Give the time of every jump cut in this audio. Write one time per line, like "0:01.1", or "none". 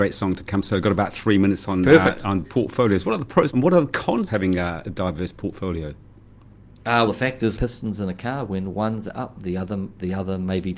0:02.4
0:03.5
0:04.3
0:07.1
0:07.6